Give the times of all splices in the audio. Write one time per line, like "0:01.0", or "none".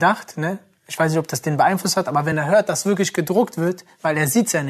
none

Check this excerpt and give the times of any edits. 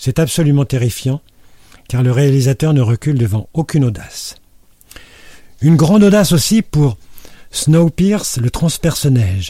none

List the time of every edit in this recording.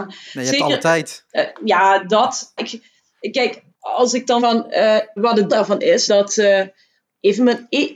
0:01.3
0:02.6
0:03.7
0:04.4
0:05.2
0:05.5
0:06.1

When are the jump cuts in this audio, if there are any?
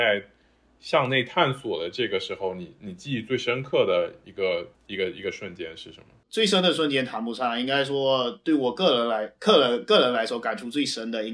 0:04.7
0:06.2

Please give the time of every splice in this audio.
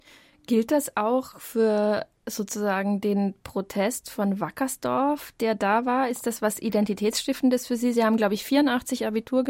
none

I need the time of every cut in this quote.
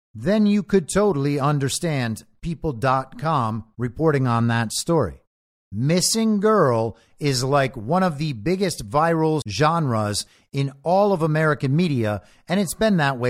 0:09.4

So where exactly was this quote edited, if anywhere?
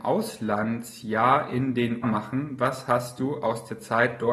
0:02.0

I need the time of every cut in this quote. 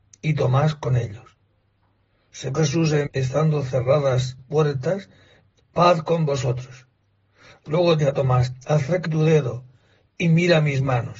0:02.5
0:03.1
0:04.4
0:05.6
0:08.0
0:09.1

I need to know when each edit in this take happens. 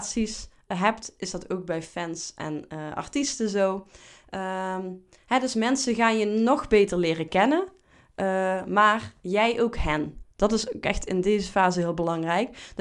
none

